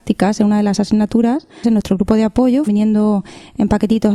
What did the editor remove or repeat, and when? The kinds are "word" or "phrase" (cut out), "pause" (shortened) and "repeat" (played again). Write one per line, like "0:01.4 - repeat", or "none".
0:01.6 - word
0:02.7 - word